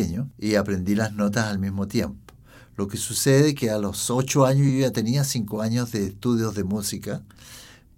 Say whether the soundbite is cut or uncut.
uncut